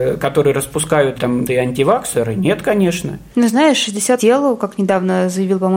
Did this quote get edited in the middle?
yes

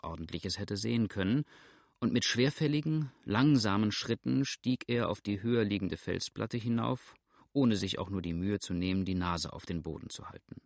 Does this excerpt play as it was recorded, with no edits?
yes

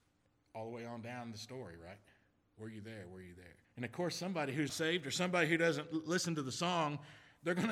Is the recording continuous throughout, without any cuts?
no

